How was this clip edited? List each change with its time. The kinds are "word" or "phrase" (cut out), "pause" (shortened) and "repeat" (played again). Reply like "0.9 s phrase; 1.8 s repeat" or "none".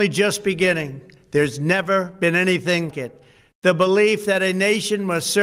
2.9 s word